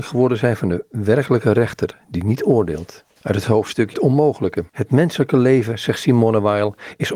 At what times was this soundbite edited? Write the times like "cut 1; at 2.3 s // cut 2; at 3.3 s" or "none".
cut 1; at 3.1 s // cut 2; at 3.9 s // cut 3; at 4.7 s